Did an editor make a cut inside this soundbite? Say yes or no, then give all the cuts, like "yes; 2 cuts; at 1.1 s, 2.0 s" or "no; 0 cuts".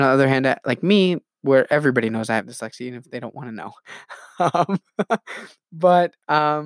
no; 0 cuts